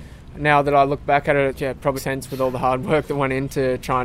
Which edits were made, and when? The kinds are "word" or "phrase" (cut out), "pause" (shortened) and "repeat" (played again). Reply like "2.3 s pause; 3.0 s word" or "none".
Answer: 1.5 s phrase; 2.0 s word